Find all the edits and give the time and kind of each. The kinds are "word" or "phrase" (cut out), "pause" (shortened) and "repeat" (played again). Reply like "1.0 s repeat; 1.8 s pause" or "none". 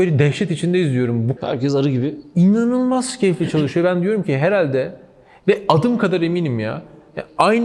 1.4 s word